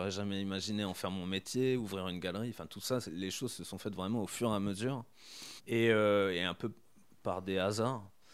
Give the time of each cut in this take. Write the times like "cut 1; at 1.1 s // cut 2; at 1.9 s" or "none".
cut 1; at 5.6 s